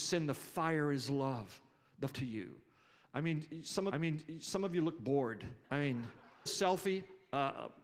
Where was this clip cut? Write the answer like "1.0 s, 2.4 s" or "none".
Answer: 2.1 s, 3.9 s, 5.6 s, 6.5 s